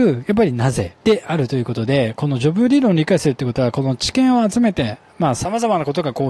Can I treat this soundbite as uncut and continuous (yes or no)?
no